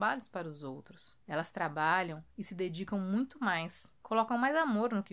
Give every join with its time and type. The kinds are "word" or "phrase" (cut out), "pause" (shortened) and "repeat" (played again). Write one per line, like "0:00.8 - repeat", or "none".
0:01.2 - pause
0:02.3 - pause
0:04.0 - pause